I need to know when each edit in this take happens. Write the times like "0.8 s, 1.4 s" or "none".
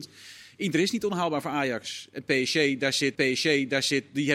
3.2 s